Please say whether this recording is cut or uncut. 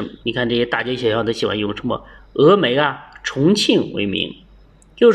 uncut